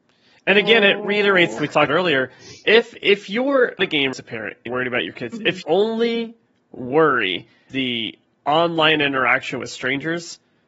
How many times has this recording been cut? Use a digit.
8